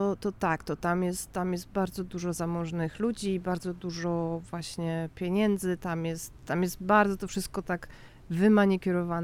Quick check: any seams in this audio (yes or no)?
no